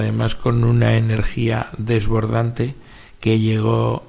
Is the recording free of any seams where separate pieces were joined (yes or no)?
yes